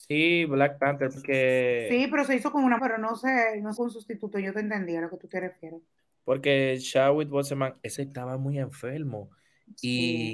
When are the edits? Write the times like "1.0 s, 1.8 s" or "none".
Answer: 1.2 s, 2.8 s, 3.8 s, 6.0 s, 8.0 s